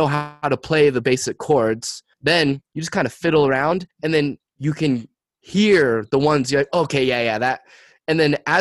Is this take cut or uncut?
cut